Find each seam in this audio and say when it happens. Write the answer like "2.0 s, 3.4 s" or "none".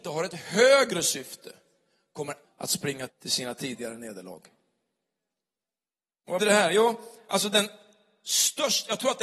2.4 s, 3.1 s, 6.4 s

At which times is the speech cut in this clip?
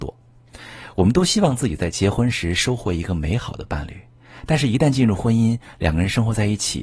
none

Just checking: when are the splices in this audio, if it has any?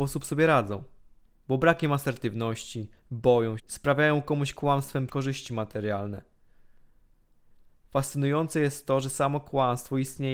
3.6 s, 5.1 s

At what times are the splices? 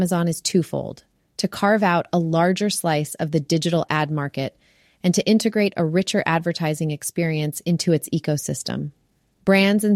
none

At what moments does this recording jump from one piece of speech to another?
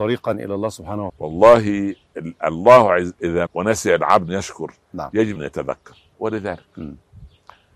1.1 s, 3.5 s, 4.3 s, 5.4 s, 6.1 s

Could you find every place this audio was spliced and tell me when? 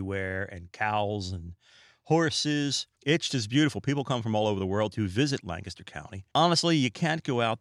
2.9 s

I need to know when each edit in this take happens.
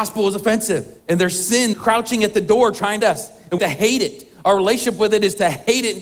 1.0 s, 1.7 s, 3.0 s, 3.6 s

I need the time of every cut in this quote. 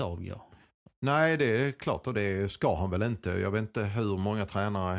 none

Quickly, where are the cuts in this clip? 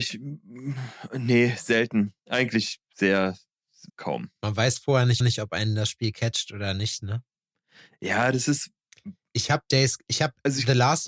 2.2 s, 3.9 s, 5.2 s

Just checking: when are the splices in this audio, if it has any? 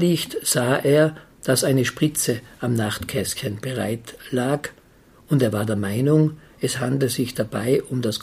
none

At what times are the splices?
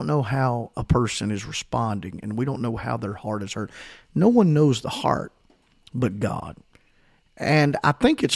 none

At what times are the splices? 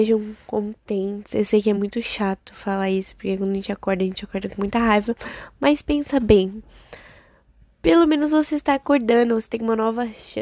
none

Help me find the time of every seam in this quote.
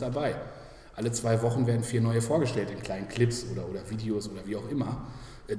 none

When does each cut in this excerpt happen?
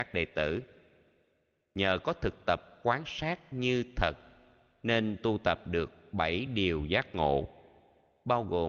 none

